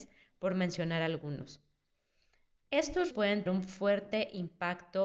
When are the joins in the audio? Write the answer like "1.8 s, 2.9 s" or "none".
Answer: 3.1 s, 3.5 s